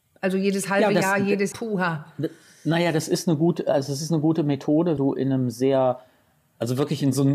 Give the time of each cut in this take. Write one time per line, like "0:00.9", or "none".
0:01.5
0:05.0